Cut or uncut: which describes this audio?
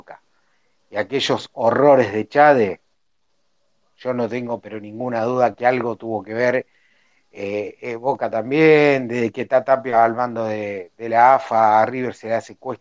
uncut